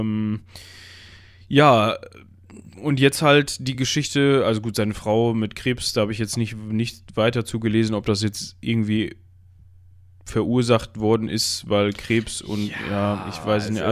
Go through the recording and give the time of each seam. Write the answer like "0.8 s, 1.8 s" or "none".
none